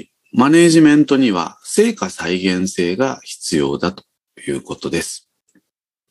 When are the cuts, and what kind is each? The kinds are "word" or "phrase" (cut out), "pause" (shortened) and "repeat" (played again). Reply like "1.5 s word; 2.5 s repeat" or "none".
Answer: none